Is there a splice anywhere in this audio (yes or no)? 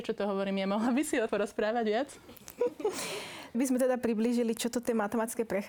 yes